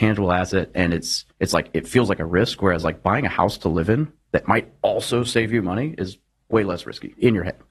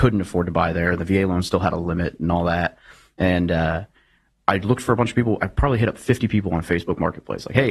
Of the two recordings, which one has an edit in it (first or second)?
first